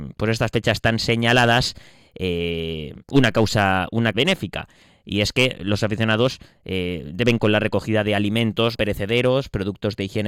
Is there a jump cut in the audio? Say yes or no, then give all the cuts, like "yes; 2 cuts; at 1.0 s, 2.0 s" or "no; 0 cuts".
yes; 4 cuts; at 3.0 s, 4.1 s, 7.4 s, 8.7 s